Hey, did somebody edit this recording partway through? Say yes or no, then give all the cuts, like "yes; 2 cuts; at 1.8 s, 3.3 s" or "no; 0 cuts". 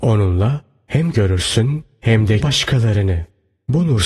yes; 2 cuts; at 1.1 s, 2.4 s